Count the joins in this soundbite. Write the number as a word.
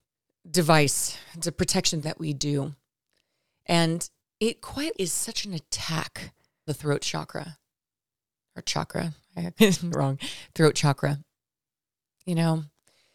six